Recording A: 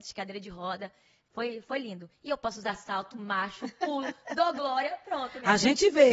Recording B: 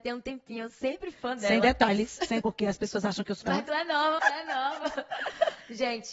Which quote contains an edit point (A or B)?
B